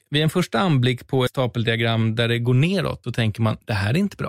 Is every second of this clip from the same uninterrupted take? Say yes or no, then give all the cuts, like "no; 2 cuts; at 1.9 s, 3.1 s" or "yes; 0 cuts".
no; 2 cuts; at 1.3 s, 3.0 s